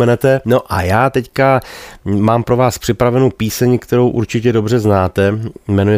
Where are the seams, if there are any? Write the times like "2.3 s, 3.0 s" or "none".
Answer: none